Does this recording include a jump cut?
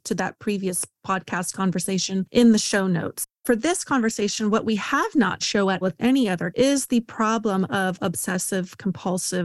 yes; 3 cuts; at 5.4 s, 5.8 s, 6.5 s

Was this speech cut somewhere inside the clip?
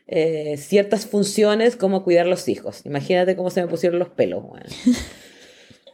no; 0 cuts

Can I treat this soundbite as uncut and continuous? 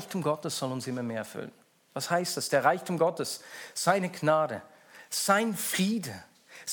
yes; 0 cuts

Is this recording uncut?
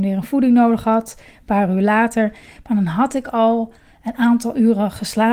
yes; 0 cuts

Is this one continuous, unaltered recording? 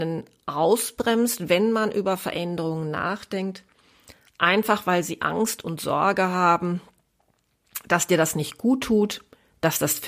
yes; 0 cuts

